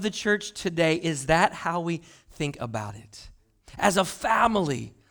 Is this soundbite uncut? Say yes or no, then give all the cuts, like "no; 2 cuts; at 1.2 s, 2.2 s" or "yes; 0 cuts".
yes; 0 cuts